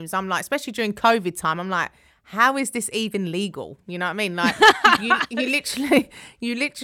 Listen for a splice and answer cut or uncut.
uncut